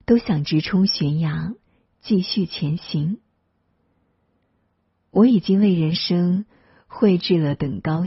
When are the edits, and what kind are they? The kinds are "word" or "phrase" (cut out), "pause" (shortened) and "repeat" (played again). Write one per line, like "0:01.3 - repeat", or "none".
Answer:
none